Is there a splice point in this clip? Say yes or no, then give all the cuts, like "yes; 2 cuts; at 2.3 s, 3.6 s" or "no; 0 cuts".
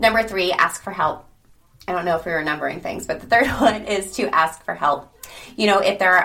no; 0 cuts